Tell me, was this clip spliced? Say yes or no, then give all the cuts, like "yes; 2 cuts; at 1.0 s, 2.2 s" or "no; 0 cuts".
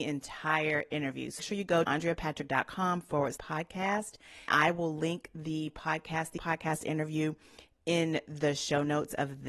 yes; 5 cuts; at 1.4 s, 1.8 s, 3.4 s, 4.5 s, 6.4 s